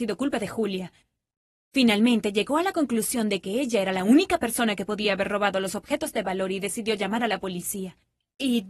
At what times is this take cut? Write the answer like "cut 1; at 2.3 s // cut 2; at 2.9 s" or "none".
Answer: none